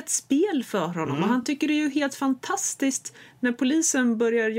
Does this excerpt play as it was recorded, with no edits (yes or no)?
yes